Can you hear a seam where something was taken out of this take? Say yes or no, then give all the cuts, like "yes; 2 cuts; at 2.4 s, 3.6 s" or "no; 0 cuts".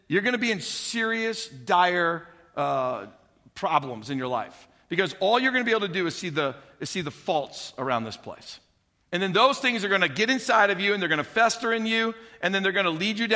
no; 0 cuts